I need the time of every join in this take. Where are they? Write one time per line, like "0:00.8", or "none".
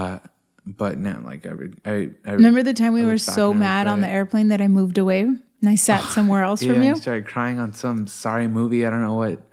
none